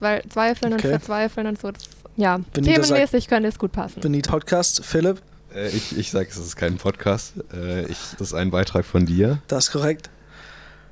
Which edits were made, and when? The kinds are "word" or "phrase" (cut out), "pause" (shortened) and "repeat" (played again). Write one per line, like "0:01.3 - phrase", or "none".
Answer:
0:02.1 - pause
0:04.2 - word
0:05.3 - pause
0:08.2 - word
0:09.4 - pause